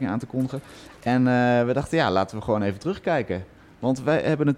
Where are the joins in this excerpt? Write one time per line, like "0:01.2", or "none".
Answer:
none